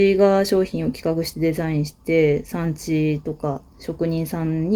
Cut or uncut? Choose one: cut